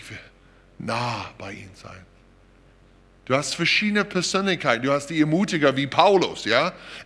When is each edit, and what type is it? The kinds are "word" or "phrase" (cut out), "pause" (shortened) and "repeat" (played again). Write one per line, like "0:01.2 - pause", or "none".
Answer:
none